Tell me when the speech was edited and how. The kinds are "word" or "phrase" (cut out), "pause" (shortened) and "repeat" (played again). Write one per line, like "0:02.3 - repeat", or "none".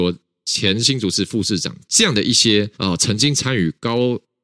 0:02.7 - pause